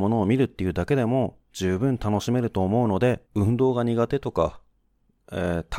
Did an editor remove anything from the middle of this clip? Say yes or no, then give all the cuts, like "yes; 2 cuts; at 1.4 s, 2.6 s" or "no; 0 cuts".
yes; 1 cut; at 3.3 s